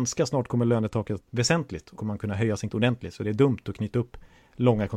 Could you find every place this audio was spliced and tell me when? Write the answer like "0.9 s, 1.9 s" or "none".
1.2 s, 2.0 s, 2.7 s